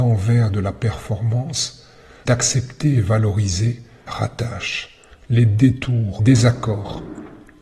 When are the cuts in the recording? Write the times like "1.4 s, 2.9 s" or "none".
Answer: 2.3 s, 4.1 s, 6.2 s